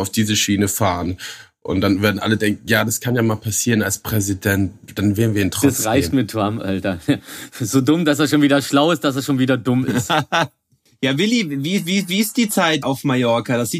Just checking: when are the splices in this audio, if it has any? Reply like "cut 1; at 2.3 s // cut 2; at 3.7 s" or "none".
cut 1; at 12.8 s